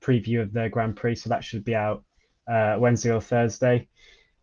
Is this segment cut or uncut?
uncut